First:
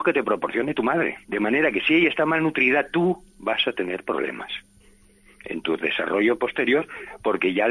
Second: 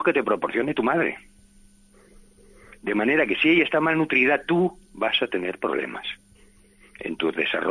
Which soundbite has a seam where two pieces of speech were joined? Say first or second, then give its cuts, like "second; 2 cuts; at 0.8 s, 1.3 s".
first; 1 cut; at 1.2 s